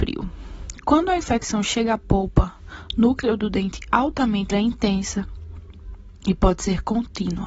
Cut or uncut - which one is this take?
cut